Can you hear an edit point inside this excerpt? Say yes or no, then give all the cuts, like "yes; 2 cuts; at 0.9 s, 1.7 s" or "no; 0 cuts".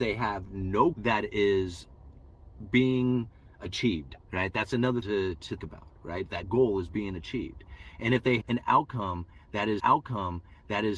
yes; 7 cuts; at 0.9 s, 4.2 s, 5.0 s, 5.6 s, 6.4 s, 8.4 s, 9.8 s